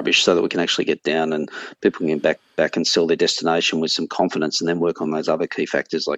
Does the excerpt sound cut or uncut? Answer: uncut